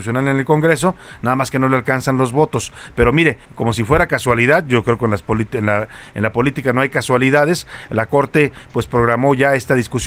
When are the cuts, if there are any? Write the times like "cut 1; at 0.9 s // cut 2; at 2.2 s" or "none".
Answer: cut 1; at 3.4 s